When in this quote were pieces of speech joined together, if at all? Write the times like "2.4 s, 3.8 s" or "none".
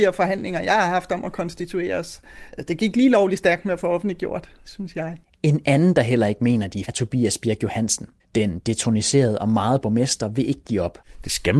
5.2 s, 6.8 s, 8.2 s, 9.8 s